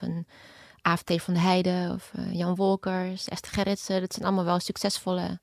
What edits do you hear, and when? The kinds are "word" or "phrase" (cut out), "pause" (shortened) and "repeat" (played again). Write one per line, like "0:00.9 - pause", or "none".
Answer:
none